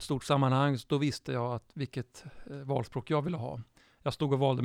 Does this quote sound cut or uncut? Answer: uncut